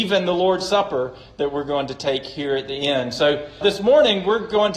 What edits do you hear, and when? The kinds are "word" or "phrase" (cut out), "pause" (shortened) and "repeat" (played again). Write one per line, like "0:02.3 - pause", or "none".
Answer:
0:03.6 - word